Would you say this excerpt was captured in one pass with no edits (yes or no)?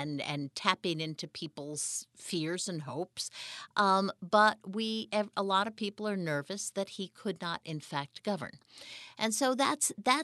yes